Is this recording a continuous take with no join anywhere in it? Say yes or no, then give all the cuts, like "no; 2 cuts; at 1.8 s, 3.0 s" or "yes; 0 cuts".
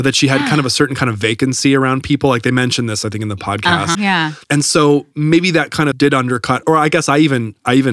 no; 4 cuts; at 3.9 s, 4.4 s, 5.9 s, 6.6 s